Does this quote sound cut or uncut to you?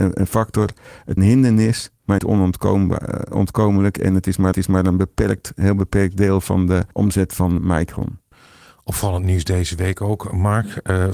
cut